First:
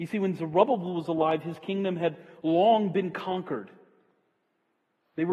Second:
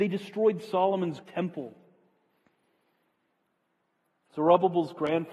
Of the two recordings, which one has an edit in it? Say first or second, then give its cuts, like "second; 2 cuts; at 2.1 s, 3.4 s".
second; 1 cut; at 1.2 s